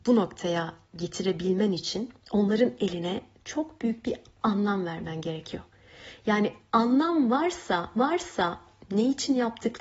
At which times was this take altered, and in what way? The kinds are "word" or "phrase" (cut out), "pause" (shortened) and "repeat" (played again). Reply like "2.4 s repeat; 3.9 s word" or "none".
2.2 s pause; 8.0 s repeat